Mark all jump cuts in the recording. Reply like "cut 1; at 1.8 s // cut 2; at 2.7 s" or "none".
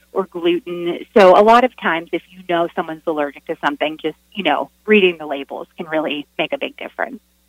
none

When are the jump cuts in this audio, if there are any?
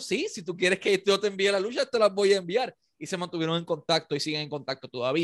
none

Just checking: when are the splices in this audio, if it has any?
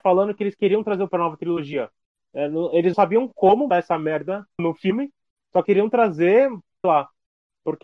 cut 1; at 1.1 s // cut 2; at 2.9 s // cut 3; at 3.7 s // cut 4; at 4.6 s // cut 5; at 5.6 s // cut 6; at 6.8 s

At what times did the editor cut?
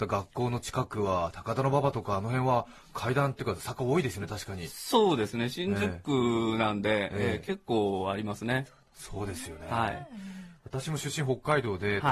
cut 1; at 10.6 s

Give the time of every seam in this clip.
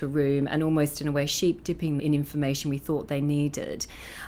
cut 1; at 2.0 s

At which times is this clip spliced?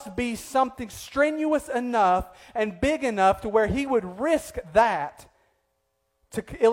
none

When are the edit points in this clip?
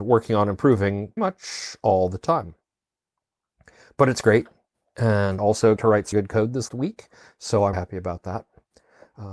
cut 1; at 1.2 s // cut 2; at 5.4 s // cut 3; at 5.8 s // cut 4; at 6.1 s // cut 5; at 6.7 s // cut 6; at 7.7 s

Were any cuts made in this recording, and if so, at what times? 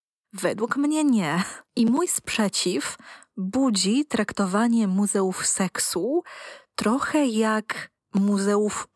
cut 1; at 1.6 s // cut 2; at 8.0 s

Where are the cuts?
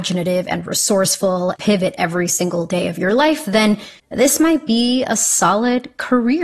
cut 1; at 1.6 s // cut 2; at 4.0 s

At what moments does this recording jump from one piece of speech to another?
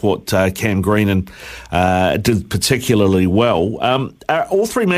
cut 1; at 2.2 s

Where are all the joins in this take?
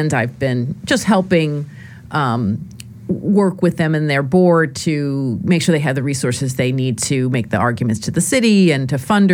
none

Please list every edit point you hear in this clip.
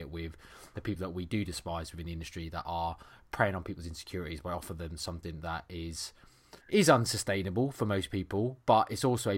cut 1; at 6.6 s

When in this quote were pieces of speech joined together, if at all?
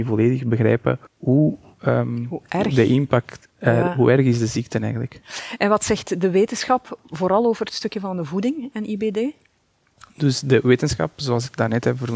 cut 1; at 1.1 s

